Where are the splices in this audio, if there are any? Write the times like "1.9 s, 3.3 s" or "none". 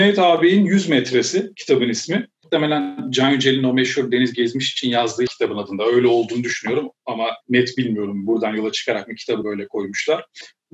5.3 s, 7.4 s, 9.4 s